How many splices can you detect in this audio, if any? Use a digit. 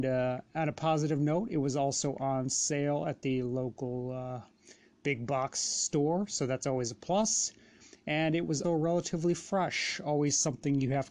1